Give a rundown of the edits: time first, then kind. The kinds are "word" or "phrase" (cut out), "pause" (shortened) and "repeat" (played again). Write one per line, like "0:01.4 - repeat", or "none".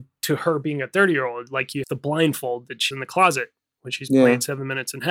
0:01.8 - word
0:02.9 - word